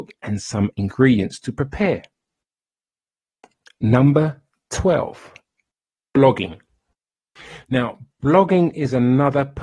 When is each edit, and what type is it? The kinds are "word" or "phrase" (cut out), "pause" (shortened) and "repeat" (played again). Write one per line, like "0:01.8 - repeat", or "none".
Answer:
none

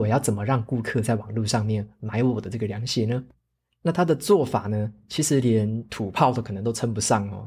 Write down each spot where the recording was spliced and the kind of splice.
none

